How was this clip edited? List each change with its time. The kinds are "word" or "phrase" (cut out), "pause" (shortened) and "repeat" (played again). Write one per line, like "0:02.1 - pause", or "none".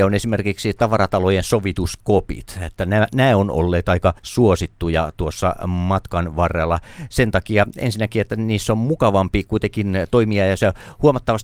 0:04.2 - pause